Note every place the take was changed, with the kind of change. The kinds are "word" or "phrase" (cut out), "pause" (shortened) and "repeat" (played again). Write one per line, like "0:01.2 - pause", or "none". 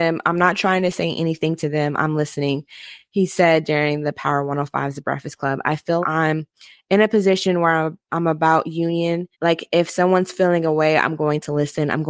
0:06.0 - word
0:09.3 - pause